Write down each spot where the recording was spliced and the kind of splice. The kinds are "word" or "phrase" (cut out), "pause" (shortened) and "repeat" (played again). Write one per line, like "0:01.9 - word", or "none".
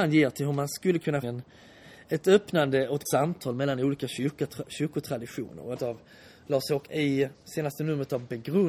0:01.2 - phrase
0:03.1 - word
0:05.8 - phrase
0:06.9 - word